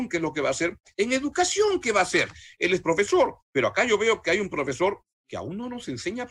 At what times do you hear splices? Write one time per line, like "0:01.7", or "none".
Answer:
0:03.5